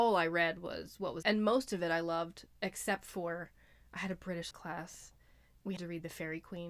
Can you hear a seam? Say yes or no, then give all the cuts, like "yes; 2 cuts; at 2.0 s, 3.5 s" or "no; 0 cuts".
yes; 3 cuts; at 1.2 s, 4.5 s, 5.8 s